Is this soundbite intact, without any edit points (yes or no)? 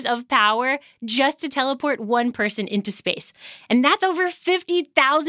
yes